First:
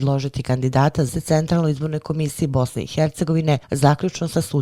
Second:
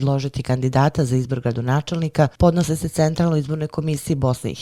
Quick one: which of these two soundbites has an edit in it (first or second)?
first